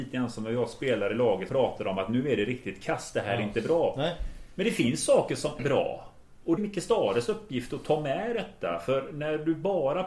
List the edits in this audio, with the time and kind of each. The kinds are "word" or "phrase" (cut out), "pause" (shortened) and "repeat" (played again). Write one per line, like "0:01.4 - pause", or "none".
0:01.5 - word
0:05.6 - word
0:06.6 - word